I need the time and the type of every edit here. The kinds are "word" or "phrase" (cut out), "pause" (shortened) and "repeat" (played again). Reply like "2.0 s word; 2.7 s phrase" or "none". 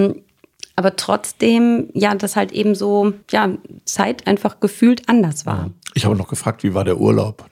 3.2 s pause